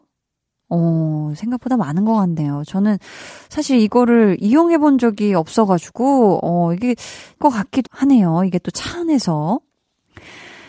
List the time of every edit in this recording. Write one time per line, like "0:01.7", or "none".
0:07.4
0:07.8